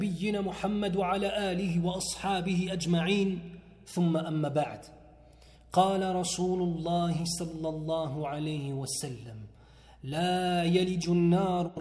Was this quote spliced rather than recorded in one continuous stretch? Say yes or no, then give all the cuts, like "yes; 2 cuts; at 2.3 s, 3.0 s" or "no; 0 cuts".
no; 0 cuts